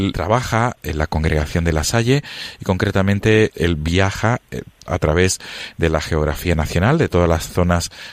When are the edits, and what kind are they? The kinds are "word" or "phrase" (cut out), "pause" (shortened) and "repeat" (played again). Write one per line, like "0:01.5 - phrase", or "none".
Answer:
0:03.5 - word
0:04.8 - word